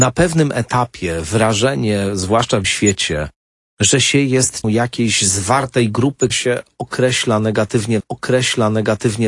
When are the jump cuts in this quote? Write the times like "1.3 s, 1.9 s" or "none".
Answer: 2.6 s, 4.6 s, 6.3 s, 8.0 s